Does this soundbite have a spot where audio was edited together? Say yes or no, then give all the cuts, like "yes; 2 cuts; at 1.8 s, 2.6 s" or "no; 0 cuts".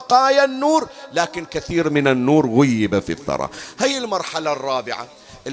no; 0 cuts